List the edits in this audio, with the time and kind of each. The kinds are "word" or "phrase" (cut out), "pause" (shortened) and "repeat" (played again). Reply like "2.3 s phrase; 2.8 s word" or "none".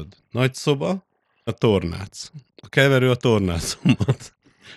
1.5 s word